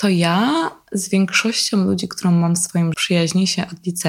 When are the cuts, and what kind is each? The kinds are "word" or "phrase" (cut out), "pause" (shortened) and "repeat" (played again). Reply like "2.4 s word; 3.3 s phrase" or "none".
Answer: 2.9 s word